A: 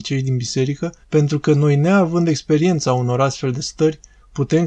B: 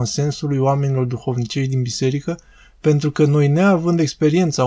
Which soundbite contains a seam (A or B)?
A